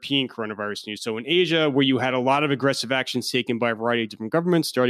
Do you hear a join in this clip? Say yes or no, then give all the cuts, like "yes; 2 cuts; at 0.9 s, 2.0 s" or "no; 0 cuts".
no; 0 cuts